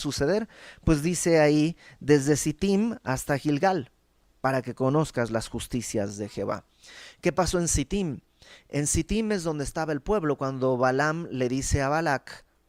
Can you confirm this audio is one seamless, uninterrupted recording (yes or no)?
yes